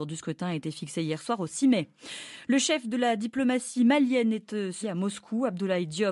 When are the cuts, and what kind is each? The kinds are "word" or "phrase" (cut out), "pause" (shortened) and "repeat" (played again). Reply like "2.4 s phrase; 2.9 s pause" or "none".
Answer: 4.8 s word